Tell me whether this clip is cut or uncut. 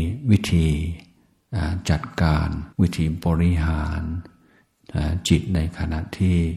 cut